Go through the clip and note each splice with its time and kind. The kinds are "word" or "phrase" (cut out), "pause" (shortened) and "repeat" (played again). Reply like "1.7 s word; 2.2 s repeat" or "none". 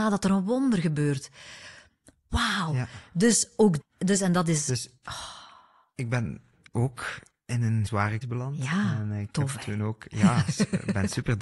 3.8 s word; 6.7 s word; 7.9 s word; 8.2 s word